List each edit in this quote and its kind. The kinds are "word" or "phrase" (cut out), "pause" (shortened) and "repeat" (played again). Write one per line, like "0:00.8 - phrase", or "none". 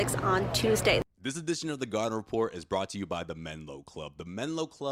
0:01.1 - pause

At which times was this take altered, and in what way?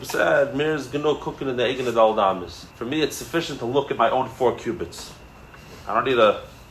0:02.7 - pause

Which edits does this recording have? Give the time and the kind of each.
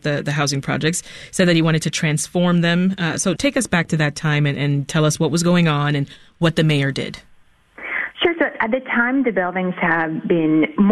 0:03.4 - word

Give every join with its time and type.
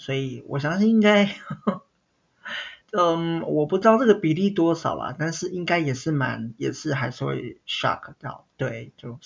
0:02.8 - pause

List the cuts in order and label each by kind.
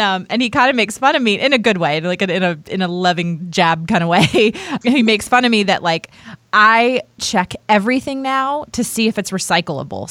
0:04.8 - word
0:07.2 - word

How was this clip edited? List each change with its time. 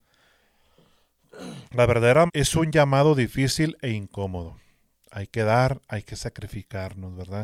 0:01.7 - pause
0:02.3 - word

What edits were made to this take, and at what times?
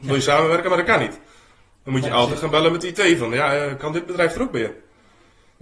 none

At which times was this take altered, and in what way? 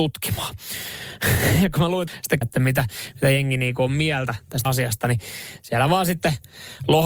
0:02.1 - word
0:02.4 - word
0:04.7 - word

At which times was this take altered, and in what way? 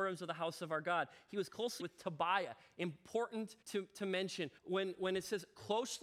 0:01.8 - word
0:03.6 - pause
0:04.6 - pause

